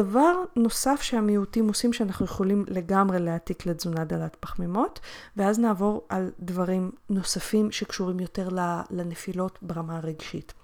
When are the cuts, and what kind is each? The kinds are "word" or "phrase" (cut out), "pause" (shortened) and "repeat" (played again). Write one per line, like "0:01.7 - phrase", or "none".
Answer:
none